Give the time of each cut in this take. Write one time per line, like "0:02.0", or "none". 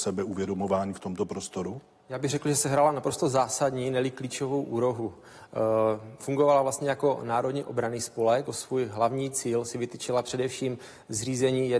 0:01.9
0:08.4